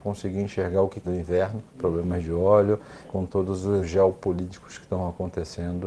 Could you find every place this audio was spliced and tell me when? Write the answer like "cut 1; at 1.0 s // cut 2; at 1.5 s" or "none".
cut 1; at 1.0 s // cut 2; at 1.7 s // cut 3; at 3.0 s // cut 4; at 3.8 s